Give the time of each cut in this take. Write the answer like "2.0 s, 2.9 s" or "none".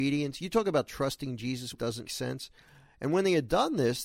1.7 s, 2.0 s